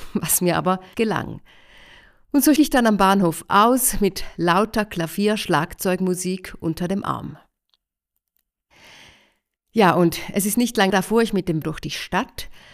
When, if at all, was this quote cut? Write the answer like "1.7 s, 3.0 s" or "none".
0.9 s, 2.6 s, 10.9 s, 11.6 s